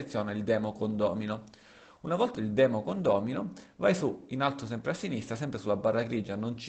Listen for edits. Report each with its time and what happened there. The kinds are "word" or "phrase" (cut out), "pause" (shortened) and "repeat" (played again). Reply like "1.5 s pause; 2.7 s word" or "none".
2.3 s word